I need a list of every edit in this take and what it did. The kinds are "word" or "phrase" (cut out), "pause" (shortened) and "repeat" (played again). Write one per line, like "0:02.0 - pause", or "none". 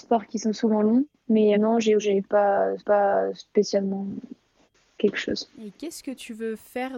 0:01.5 - word
0:02.0 - phrase
0:02.8 - repeat